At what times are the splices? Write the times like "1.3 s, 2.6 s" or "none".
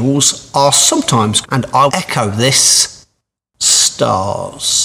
1.4 s, 1.9 s